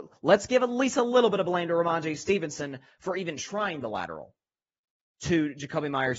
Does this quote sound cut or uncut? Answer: uncut